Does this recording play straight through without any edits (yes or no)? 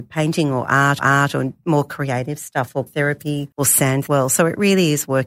no